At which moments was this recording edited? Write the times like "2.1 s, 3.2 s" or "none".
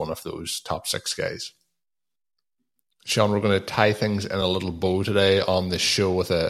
none